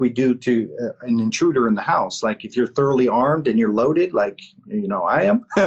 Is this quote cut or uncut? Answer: uncut